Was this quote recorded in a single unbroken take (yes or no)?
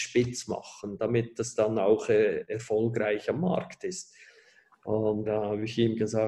no